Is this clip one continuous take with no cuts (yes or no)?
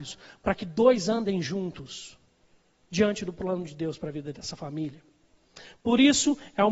yes